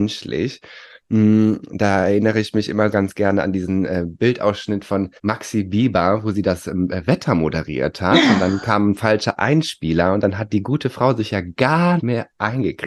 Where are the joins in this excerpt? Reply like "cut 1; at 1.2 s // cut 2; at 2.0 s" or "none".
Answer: cut 1; at 2.9 s // cut 2; at 5.2 s // cut 3; at 12.0 s